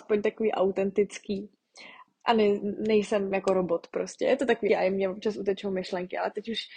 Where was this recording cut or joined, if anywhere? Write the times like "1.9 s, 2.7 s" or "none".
2.1 s, 3.3 s, 4.7 s